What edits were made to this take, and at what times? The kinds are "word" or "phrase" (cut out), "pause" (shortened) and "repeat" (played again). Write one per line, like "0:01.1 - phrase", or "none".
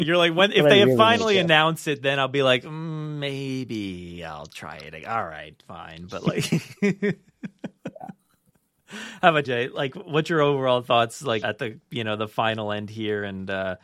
0:09.4 - word
0:11.4 - word